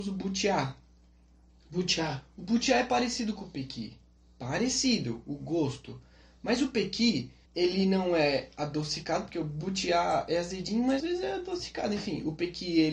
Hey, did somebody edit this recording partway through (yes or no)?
yes